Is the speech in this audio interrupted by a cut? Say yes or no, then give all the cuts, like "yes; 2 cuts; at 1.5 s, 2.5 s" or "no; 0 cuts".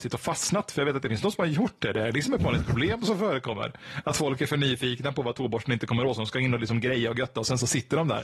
no; 0 cuts